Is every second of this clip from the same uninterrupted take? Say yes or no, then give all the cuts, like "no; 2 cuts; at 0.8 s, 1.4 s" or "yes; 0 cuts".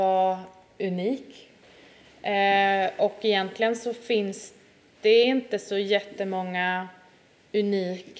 yes; 0 cuts